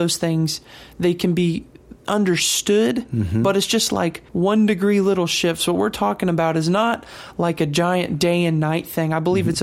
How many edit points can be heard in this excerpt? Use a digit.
2